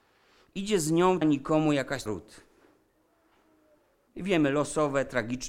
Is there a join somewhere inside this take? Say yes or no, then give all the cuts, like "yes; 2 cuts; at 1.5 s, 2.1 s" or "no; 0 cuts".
yes; 2 cuts; at 1.2 s, 2.1 s